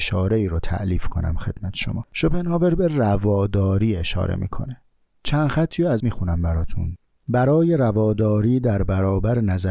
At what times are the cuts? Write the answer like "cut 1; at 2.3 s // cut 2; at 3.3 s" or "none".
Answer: cut 1; at 6.0 s